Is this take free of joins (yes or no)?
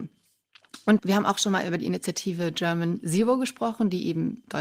no